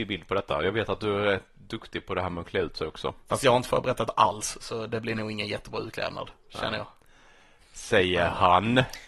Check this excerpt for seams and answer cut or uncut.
uncut